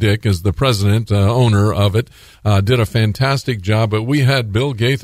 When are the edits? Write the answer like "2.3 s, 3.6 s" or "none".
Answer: none